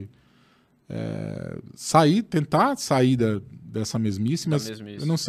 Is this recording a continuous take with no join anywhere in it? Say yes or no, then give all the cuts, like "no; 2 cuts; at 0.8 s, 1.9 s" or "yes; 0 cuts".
yes; 0 cuts